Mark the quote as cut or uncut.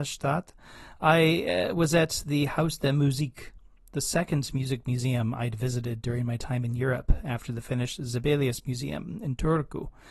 uncut